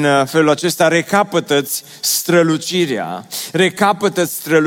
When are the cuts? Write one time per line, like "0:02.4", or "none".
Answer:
none

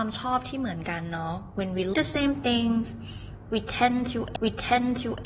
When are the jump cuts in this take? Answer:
0:01.9
0:04.4

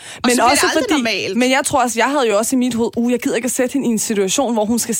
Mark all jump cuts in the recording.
none

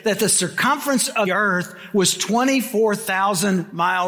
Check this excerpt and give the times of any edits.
0:01.3

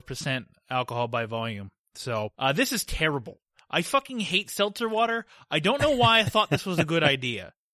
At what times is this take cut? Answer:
0:02.3

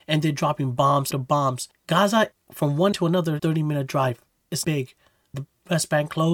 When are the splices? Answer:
0:01.1
0:02.3
0:02.9
0:03.4
0:04.6
0:05.3

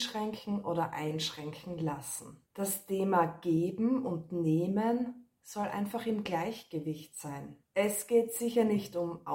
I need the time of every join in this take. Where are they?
0:02.5
0:07.6

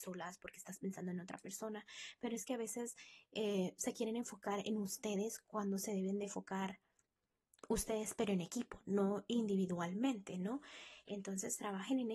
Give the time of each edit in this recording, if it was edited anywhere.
none

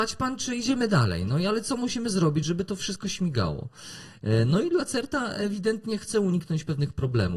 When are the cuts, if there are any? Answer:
none

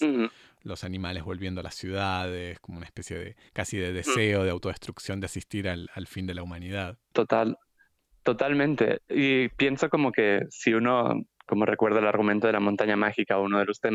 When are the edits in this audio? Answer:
none

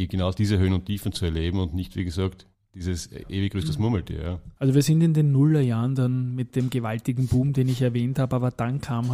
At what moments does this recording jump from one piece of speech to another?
0:02.5
0:04.6

